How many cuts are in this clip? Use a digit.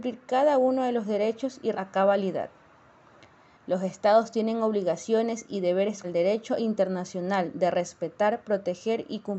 2